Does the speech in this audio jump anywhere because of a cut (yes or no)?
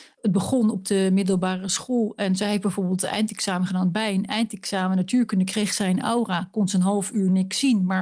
no